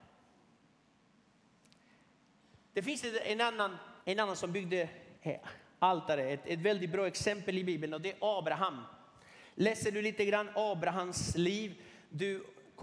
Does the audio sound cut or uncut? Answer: cut